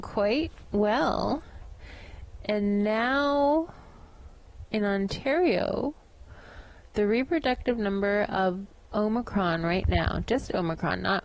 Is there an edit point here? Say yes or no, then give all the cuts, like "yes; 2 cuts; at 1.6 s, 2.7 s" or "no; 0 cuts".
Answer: no; 0 cuts